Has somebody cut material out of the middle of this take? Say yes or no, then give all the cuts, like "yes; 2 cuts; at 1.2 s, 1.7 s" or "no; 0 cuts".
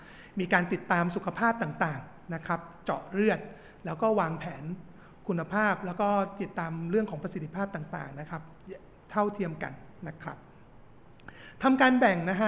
no; 0 cuts